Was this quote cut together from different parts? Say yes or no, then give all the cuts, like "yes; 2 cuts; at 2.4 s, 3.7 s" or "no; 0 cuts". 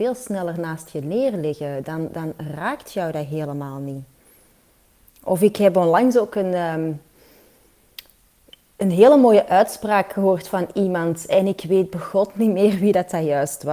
no; 0 cuts